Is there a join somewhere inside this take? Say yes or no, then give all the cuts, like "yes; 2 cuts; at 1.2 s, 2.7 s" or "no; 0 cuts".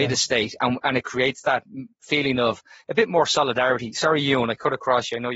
yes; 1 cut; at 1.9 s